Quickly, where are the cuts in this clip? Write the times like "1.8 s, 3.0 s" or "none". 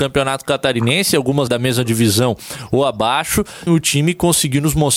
1.5 s, 3.7 s